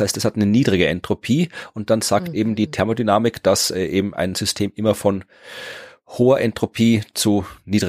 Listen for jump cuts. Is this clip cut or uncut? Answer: uncut